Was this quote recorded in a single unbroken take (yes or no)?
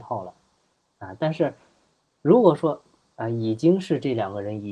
yes